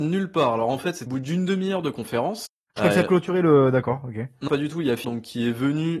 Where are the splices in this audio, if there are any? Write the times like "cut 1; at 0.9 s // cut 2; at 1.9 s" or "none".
cut 1; at 1.1 s // cut 2; at 2.8 s // cut 3; at 4.5 s // cut 4; at 5.0 s